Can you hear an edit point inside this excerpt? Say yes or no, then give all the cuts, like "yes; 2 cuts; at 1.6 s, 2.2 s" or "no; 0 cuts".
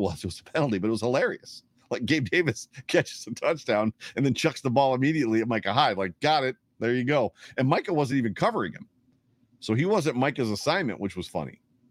no; 0 cuts